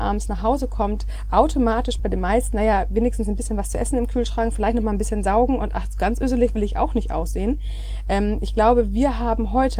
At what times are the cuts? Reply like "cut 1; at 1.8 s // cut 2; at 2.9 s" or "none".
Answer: cut 1; at 2.0 s